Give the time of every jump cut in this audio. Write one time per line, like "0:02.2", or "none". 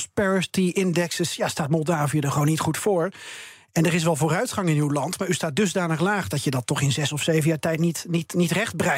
none